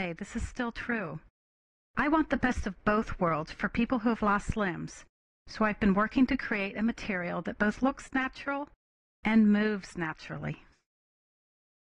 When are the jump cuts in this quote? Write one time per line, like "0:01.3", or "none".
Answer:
none